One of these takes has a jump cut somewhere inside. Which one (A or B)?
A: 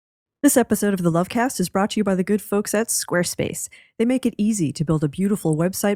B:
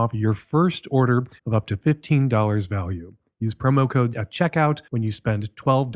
B